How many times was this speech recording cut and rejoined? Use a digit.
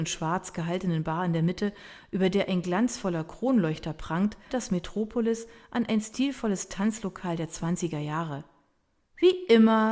1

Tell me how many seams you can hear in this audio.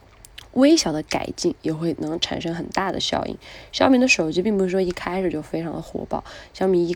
1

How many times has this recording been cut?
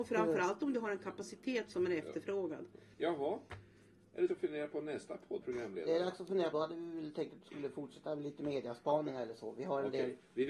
4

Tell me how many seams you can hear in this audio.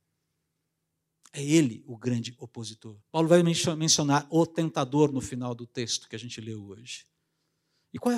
1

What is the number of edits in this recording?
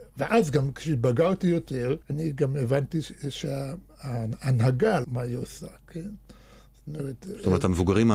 2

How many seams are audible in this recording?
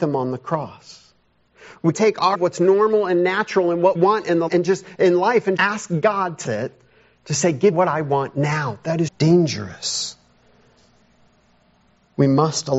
8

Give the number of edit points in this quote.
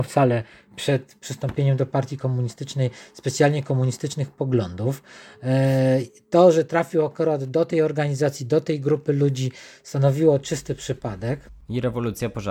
0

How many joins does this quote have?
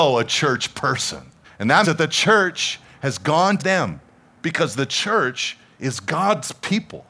3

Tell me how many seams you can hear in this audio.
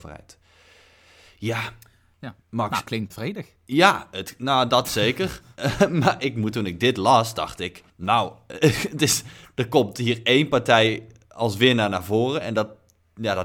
5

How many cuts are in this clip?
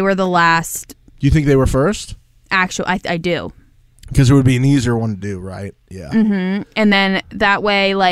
0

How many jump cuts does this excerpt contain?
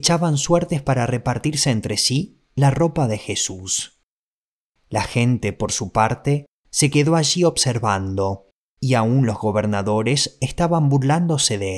0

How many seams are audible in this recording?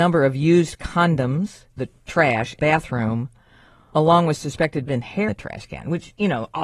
6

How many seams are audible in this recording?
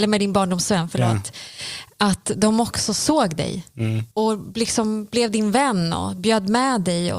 1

